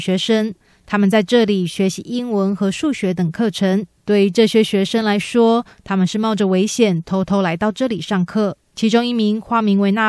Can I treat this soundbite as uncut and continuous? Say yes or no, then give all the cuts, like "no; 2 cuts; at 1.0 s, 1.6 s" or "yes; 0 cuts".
no; 2 cuts; at 4.0 s, 8.7 s